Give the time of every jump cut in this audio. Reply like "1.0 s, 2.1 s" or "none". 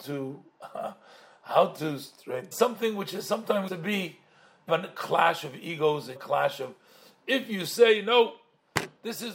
2.5 s, 3.7 s, 4.7 s, 6.2 s